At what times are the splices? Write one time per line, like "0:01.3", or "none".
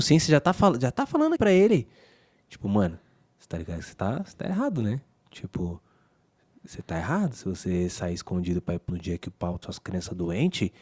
0:01.3
0:08.9
0:09.6